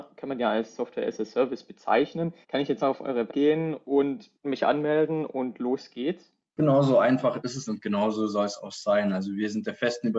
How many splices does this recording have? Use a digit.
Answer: 6